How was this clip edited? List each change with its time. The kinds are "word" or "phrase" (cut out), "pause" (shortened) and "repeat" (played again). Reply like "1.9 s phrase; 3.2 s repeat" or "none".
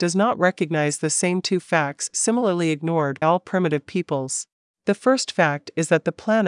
3.2 s word; 4.5 s pause